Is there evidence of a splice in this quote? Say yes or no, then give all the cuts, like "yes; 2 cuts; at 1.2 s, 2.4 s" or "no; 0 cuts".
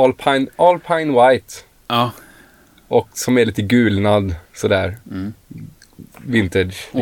no; 0 cuts